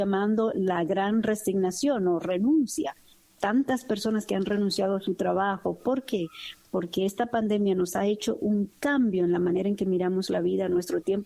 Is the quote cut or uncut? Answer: uncut